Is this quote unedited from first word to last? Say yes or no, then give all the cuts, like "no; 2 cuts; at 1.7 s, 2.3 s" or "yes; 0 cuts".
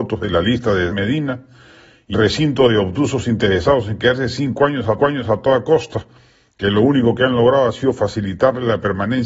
no; 3 cuts; at 0.9 s, 2.1 s, 5.0 s